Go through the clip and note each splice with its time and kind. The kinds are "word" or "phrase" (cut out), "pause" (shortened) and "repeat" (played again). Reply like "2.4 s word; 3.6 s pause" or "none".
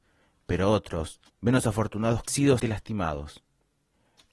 1.3 s pause; 2.3 s phrase; 2.6 s word